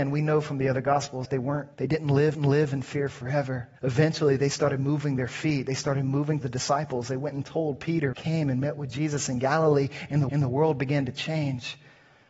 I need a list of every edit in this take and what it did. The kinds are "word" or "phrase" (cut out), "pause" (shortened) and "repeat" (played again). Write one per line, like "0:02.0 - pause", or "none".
0:01.2 - word
0:01.7 - pause
0:02.3 - repeat
0:03.8 - pause
0:06.4 - word
0:08.1 - phrase
0:10.3 - repeat